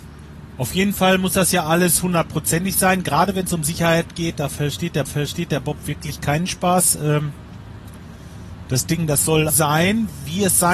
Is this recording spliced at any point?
yes; 2 cuts; at 5.1 s, 9.5 s

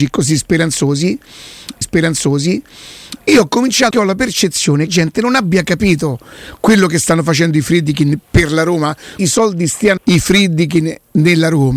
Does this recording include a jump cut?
yes; 5 cuts; at 1.8 s, 3.9 s, 4.9 s, 9.2 s, 10.0 s

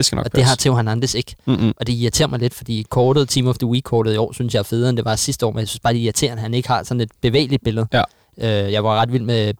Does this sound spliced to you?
no; 0 cuts

